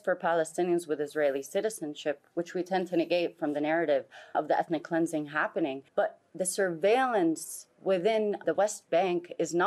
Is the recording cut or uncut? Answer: cut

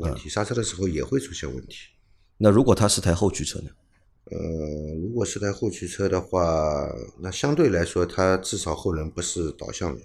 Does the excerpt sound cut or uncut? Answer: uncut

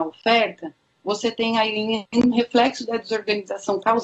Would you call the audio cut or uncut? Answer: cut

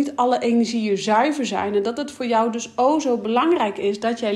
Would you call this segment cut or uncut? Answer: uncut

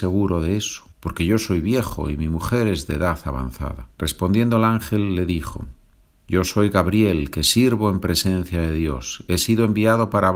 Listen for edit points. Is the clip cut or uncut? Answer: cut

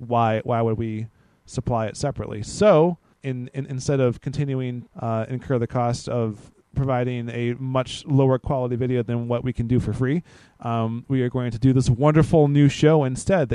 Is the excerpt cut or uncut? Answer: uncut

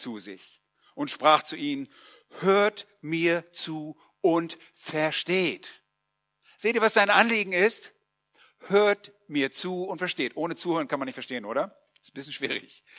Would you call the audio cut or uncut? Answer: uncut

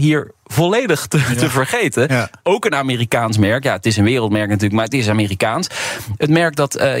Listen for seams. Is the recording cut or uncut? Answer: uncut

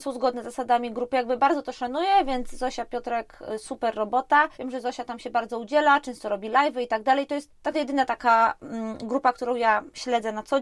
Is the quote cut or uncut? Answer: cut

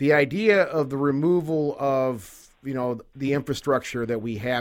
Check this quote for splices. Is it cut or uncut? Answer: uncut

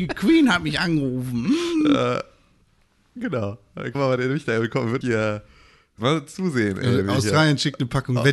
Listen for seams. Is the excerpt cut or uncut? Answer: cut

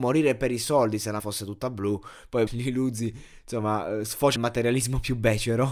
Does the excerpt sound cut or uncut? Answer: cut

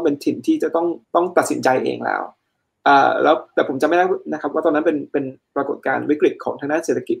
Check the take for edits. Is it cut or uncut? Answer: cut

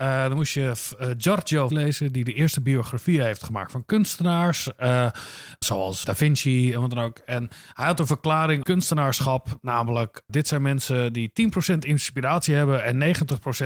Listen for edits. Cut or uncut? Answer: cut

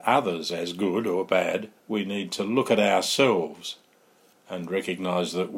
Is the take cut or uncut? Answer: cut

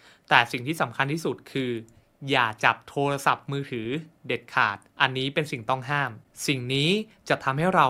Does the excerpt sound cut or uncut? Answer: cut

